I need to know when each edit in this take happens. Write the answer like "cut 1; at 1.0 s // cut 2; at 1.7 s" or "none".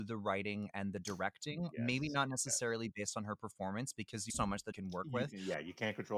cut 1; at 4.3 s // cut 2; at 4.7 s